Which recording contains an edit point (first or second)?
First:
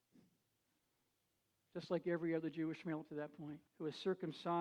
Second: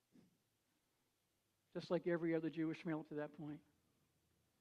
first